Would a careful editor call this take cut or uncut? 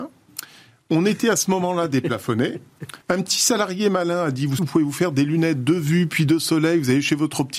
cut